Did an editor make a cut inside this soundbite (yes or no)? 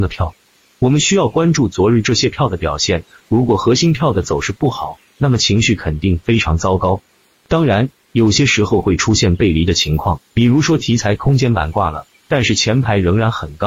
no